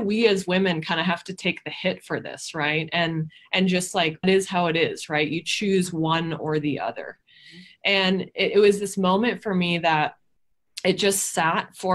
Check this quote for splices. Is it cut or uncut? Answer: cut